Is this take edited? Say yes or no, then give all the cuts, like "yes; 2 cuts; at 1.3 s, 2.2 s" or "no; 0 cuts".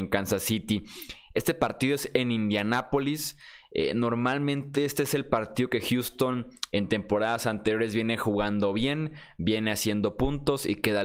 no; 0 cuts